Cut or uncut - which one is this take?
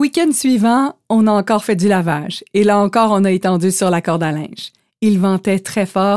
uncut